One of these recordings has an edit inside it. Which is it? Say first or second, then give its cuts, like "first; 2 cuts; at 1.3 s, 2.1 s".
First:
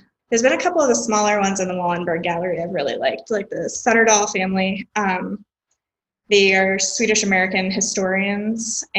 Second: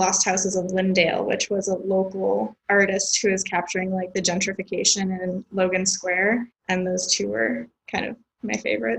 second; 1 cut; at 6.5 s